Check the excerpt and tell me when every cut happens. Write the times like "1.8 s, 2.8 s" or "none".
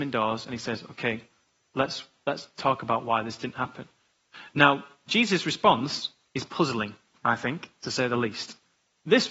none